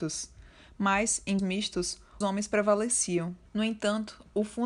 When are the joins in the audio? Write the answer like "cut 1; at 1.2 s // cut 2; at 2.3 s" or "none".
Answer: cut 1; at 1.4 s // cut 2; at 2.2 s // cut 3; at 3.5 s